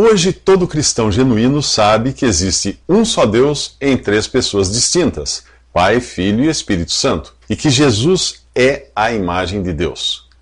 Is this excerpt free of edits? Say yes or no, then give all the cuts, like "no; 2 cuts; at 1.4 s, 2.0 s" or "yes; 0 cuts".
no; 1 cut; at 7.4 s